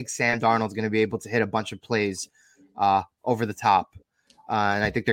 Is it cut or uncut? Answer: uncut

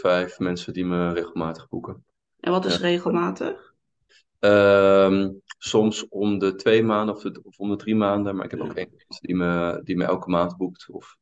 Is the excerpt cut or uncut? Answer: uncut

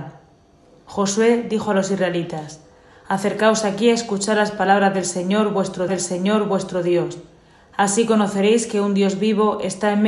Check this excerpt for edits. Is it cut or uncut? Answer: cut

